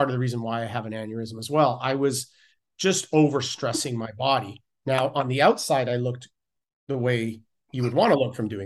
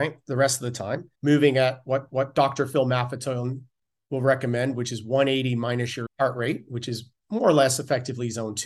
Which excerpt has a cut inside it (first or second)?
second